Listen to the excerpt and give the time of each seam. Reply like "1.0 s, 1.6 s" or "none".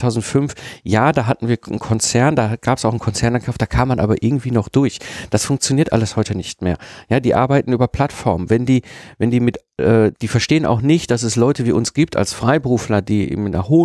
10.1 s